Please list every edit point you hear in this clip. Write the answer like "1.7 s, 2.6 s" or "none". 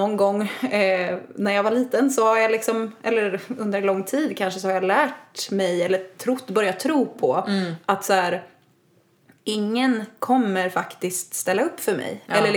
none

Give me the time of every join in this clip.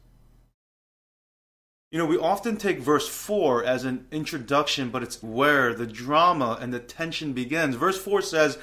5.2 s

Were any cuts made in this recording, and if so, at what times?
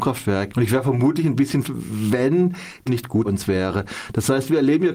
1.6 s, 2.9 s, 3.2 s

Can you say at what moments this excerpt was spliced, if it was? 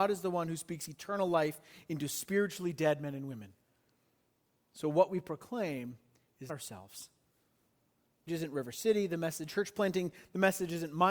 6.5 s, 8.3 s, 9.5 s

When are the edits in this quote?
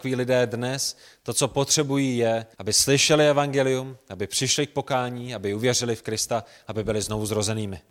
2.5 s

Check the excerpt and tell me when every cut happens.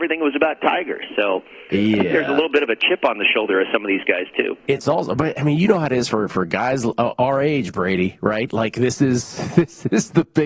none

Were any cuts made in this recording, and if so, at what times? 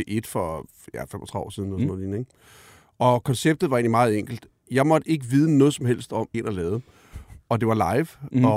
6.3 s

